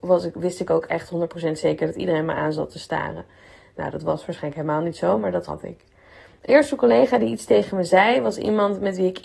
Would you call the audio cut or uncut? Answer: cut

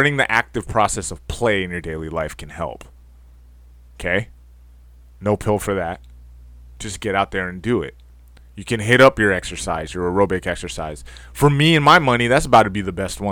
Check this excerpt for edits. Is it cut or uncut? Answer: uncut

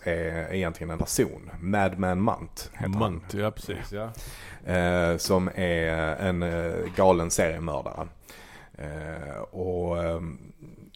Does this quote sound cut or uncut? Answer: cut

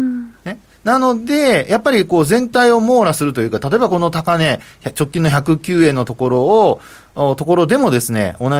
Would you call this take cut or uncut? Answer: uncut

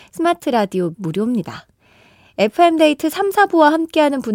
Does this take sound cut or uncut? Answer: cut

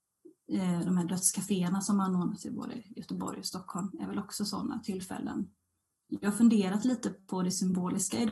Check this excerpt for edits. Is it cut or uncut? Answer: uncut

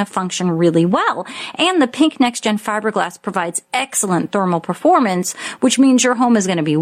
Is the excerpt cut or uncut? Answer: uncut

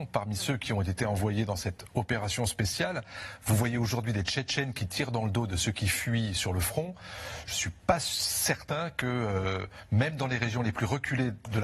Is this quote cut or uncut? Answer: uncut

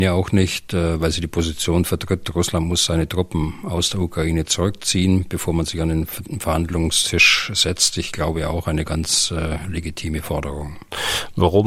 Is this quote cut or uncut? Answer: uncut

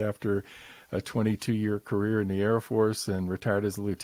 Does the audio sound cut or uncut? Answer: uncut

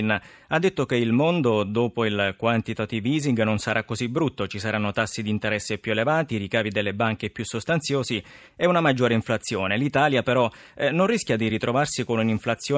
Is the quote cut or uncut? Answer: uncut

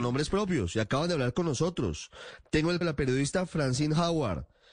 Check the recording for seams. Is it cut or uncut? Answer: cut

